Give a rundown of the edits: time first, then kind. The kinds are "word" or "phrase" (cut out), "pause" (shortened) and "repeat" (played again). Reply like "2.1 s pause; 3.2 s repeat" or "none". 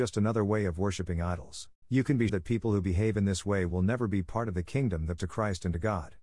1.8 s pause; 2.3 s word; 5.2 s word

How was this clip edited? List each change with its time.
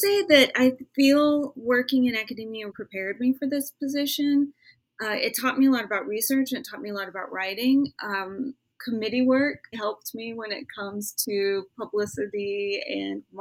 1.5 s word; 2.7 s word; 9.7 s word

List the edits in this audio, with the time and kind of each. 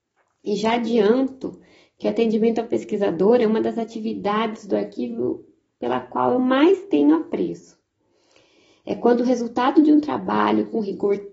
none

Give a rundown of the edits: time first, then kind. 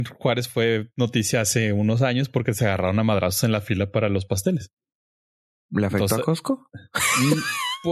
none

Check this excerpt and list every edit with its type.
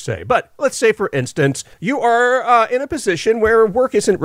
1.7 s pause

